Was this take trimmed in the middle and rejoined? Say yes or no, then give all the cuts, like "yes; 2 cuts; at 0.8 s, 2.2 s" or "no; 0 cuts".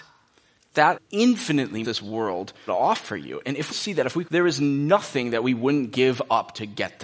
yes; 5 cuts; at 0.9 s, 1.8 s, 2.7 s, 3.7 s, 4.2 s